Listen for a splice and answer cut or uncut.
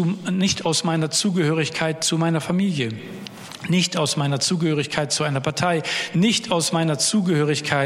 uncut